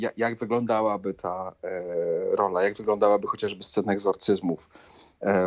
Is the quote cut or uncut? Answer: uncut